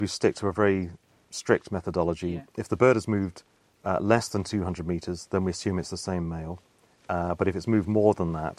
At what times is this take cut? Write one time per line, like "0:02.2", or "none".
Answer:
none